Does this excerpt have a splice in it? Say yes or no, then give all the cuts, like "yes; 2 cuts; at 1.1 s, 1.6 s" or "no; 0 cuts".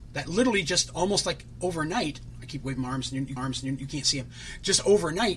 yes; 1 cut; at 3.4 s